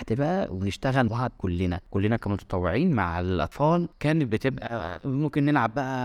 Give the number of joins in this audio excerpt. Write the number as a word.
one